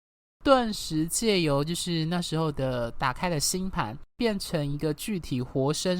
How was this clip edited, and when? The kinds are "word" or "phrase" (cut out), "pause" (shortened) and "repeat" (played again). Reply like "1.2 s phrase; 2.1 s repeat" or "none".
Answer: 4.1 s pause